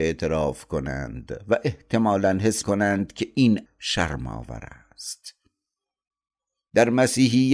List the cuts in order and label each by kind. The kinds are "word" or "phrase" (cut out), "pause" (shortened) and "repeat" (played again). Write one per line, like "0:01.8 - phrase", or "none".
0:02.6 - word
0:03.7 - word